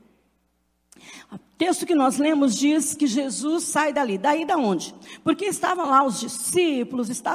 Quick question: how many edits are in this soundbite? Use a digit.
0